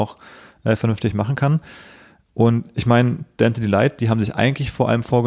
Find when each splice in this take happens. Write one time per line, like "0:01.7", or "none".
none

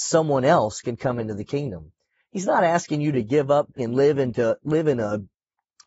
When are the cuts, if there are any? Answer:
0:03.8

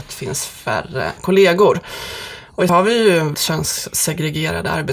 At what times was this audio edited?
0:01.2
0:02.7
0:03.3

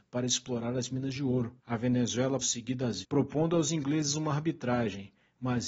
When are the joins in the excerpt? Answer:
0:01.6
0:02.4
0:03.0

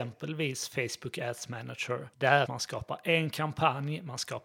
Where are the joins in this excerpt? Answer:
0:02.1
0:02.5

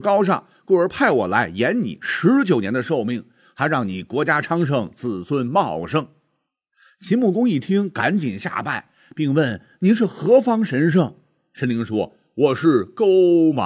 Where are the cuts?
none

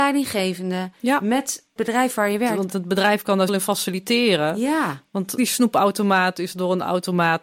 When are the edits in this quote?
0:01.8
0:02.7
0:03.5
0:05.4

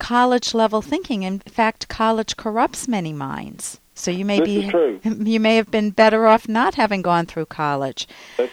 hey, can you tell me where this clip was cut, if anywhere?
none

